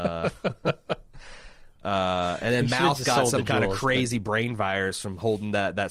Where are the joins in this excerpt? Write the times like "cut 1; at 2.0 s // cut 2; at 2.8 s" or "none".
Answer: none